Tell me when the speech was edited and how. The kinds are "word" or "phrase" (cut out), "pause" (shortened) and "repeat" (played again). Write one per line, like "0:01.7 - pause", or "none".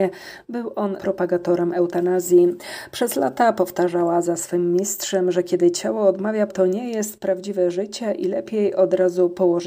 0:01.0 - word
0:06.5 - word